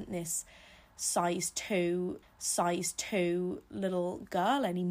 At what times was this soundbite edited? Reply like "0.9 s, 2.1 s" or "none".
2.2 s